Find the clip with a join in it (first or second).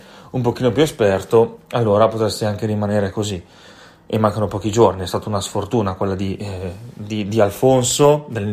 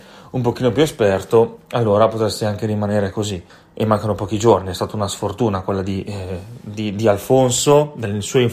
second